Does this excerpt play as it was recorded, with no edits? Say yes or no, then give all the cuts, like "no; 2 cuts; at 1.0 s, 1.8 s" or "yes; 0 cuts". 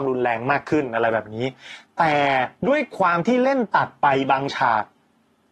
no; 1 cut; at 2.6 s